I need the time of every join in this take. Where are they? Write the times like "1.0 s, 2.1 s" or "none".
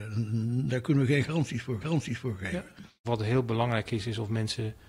1.8 s